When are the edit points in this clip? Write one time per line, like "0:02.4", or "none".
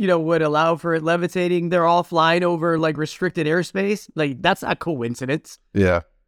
none